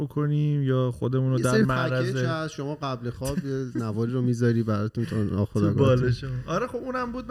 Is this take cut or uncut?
uncut